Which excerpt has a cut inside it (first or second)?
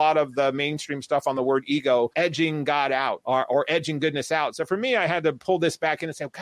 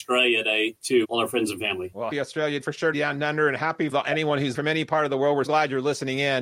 second